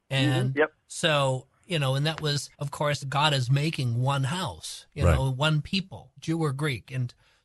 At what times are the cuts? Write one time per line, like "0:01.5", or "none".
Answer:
0:02.5
0:03.0
0:06.2